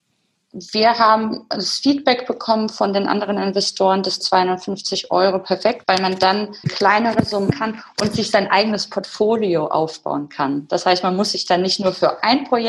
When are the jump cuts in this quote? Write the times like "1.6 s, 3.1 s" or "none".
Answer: 4.2 s, 5.8 s, 6.6 s, 7.5 s